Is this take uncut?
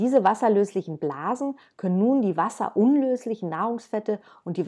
yes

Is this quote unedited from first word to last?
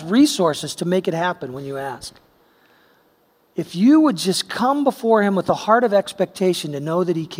yes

